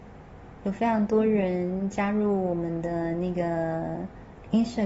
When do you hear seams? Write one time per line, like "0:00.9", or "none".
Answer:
none